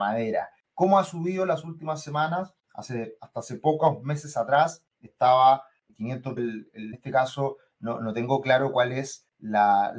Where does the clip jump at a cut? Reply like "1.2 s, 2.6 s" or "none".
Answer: 6.4 s